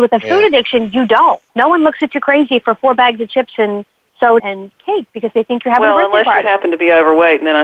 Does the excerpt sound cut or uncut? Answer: cut